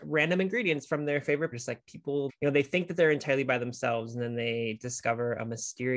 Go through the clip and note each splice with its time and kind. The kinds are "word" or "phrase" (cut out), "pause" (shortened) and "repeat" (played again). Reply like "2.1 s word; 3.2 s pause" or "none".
1.5 s phrase; 2.3 s word